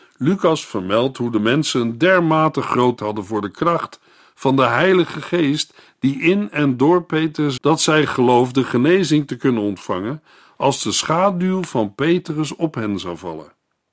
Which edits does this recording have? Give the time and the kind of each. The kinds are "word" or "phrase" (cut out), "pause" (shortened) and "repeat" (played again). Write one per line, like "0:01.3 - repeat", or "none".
0:03.0 - word
0:07.6 - word